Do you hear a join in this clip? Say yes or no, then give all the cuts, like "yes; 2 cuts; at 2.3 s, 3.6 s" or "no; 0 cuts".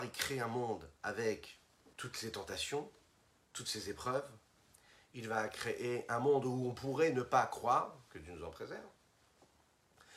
yes; 1 cut; at 1.9 s